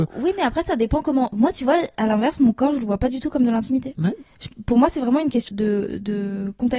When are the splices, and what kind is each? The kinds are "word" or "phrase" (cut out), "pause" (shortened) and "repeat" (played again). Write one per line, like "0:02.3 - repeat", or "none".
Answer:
0:05.5 - word